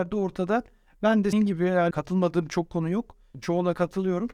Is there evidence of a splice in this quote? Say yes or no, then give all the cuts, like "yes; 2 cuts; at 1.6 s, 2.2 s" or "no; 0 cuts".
yes; 2 cuts; at 1.3 s, 1.9 s